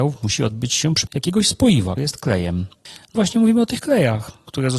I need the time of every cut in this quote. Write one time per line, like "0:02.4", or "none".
0:01.1
0:02.0
0:03.1